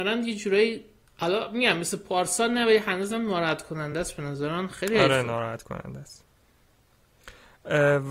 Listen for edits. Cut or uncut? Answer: uncut